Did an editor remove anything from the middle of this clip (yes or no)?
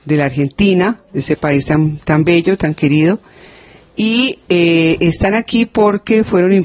no